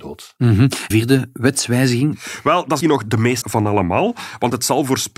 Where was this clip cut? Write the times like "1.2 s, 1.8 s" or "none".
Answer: 0.9 s, 2.8 s, 3.4 s